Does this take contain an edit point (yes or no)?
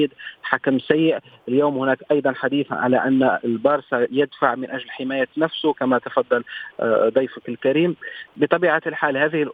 no